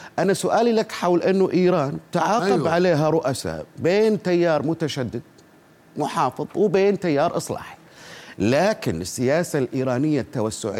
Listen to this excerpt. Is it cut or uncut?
uncut